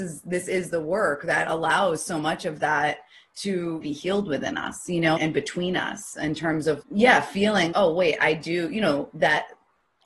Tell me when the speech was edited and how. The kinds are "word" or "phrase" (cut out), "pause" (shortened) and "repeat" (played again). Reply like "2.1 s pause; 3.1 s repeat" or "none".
3.8 s word; 5.2 s word; 6.8 s word; 7.7 s word